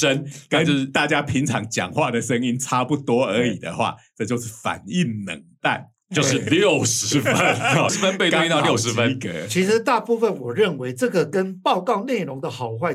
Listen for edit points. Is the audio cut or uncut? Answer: cut